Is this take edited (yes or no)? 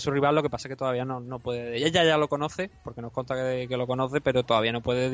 no